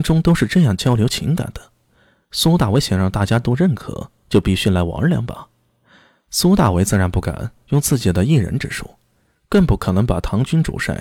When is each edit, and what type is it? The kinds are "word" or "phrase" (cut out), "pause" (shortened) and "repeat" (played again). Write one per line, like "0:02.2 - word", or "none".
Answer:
none